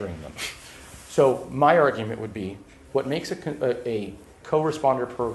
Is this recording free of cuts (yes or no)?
yes